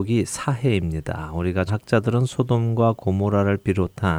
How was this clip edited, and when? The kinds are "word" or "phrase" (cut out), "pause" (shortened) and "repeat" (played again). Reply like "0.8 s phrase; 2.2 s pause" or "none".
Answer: 1.7 s phrase